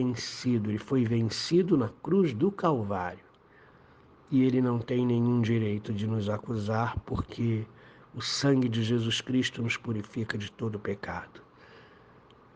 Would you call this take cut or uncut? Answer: uncut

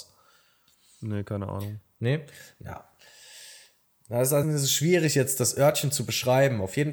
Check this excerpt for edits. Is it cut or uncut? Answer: cut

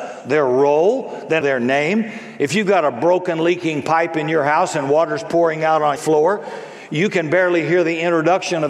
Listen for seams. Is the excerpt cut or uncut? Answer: cut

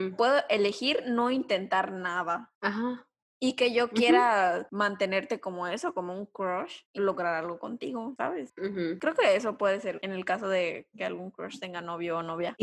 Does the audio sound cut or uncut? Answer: cut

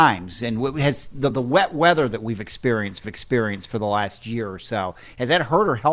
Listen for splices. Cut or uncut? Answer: cut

